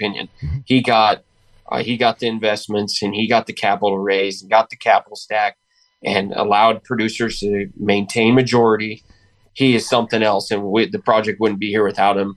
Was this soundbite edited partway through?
no; 0 cuts

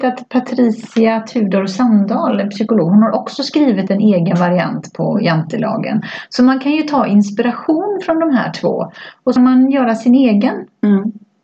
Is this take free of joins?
no; 1 cut; at 9.4 s

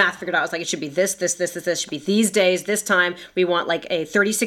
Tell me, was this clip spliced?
no; 0 cuts

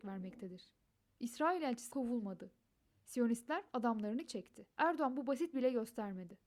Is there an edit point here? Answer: yes; 4 cuts; at 1.9 s, 4.3 s, 4.7 s, 5.5 s

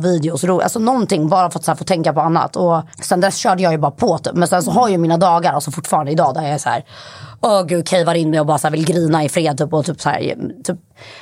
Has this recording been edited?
yes; 1 cut; at 2.9 s

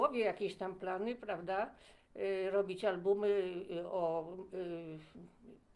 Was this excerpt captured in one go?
yes; 0 cuts

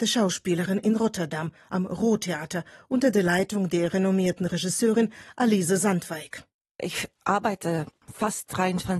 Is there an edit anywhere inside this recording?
no; 0 cuts

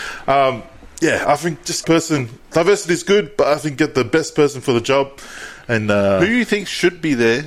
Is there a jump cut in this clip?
yes; 1 cut; at 1.8 s

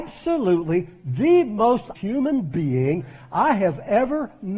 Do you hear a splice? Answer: yes; 1 cut; at 2.0 s

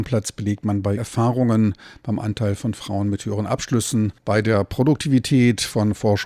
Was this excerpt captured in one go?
no; 2 cuts; at 1.0 s, 4.2 s

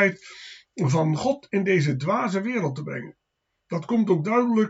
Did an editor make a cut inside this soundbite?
no; 0 cuts

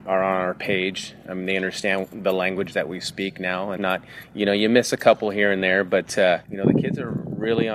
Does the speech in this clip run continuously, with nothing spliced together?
no; 2 cuts; at 3.8 s, 6.4 s

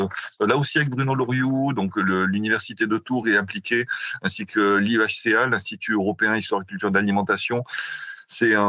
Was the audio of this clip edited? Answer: no; 0 cuts

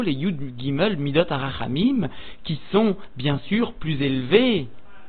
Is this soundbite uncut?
yes; 0 cuts

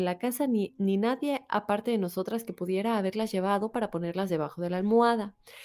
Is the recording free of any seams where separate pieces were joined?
yes; 0 cuts

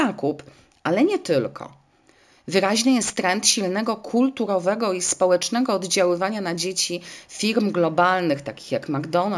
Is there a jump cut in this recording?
no; 0 cuts

